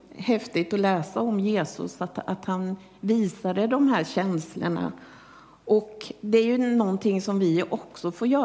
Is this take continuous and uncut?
yes; 0 cuts

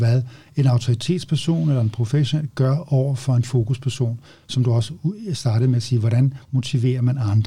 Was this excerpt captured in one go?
yes; 0 cuts

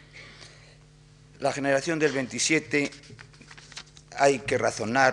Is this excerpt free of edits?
yes; 0 cuts

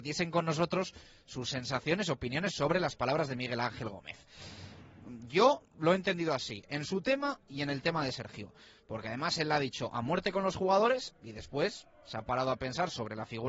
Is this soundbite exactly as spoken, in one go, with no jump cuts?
yes; 0 cuts

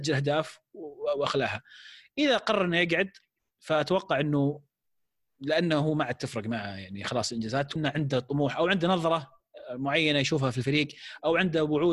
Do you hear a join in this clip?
yes; 1 cut; at 7.8 s

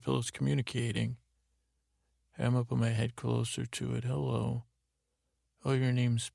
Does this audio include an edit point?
no; 0 cuts

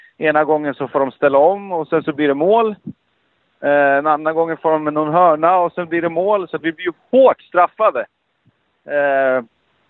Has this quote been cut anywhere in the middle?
no; 0 cuts

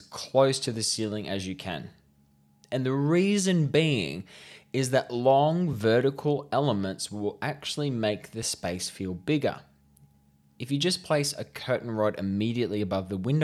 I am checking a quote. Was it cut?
no; 0 cuts

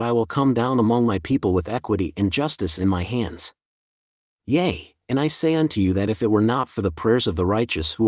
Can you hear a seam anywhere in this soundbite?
no; 0 cuts

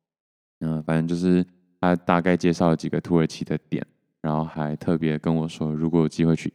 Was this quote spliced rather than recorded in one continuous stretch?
no; 0 cuts

